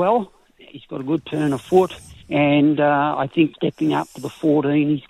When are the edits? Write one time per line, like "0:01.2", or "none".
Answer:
0:02.2
0:03.5